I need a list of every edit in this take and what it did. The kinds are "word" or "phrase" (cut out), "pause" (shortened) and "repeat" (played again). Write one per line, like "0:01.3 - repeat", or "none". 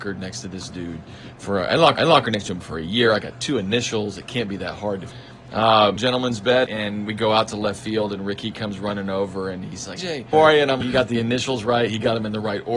0:02.0 - repeat
0:05.1 - phrase
0:06.0 - phrase
0:06.7 - word
0:10.0 - word
0:10.3 - phrase
0:10.8 - word